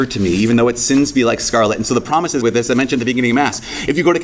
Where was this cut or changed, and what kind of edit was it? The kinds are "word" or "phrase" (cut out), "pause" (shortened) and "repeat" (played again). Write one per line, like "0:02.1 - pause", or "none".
0:02.4 - word

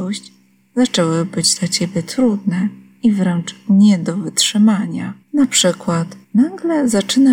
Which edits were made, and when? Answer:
0:05.2 - pause
0:06.2 - pause

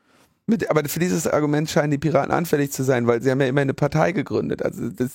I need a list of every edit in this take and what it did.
none

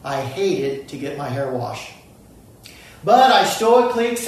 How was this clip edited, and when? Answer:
none

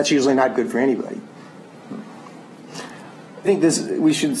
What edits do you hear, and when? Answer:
0:03.4 - phrase

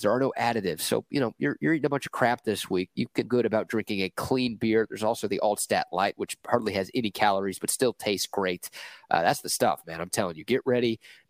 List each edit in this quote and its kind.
0:03.3 - phrase

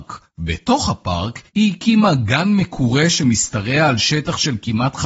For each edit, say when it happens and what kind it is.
none

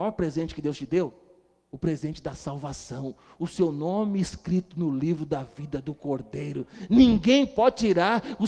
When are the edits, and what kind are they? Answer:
none

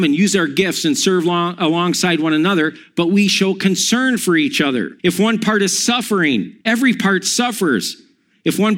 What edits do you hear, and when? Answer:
0:05.0 - pause
0:06.6 - pause

